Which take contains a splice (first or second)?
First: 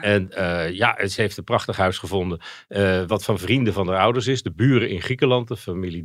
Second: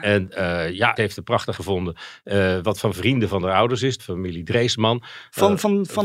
second